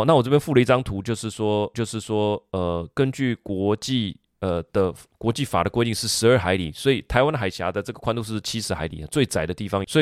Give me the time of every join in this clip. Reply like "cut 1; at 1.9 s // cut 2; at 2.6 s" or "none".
cut 1; at 1.7 s